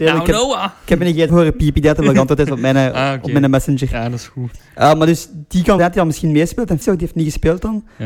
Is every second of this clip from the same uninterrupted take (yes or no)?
no